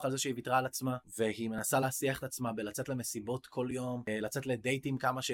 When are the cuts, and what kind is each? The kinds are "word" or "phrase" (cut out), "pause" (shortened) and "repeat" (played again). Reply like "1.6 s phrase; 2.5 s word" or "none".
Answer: none